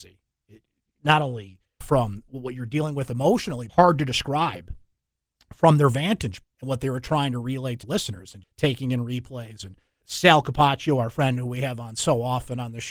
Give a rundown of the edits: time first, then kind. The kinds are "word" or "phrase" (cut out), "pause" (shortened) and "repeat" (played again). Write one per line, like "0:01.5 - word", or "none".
0:01.8 - word
0:03.7 - word
0:06.4 - word
0:07.8 - word
0:08.4 - word
0:10.0 - word